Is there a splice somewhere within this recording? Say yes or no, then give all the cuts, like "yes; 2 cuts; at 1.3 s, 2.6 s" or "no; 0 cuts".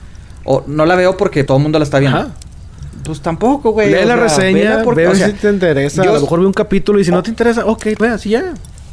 yes; 2 cuts; at 1.5 s, 8.0 s